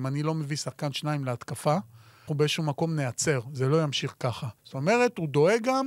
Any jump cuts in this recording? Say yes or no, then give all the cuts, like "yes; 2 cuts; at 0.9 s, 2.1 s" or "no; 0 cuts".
yes; 2 cuts; at 2.3 s, 4.6 s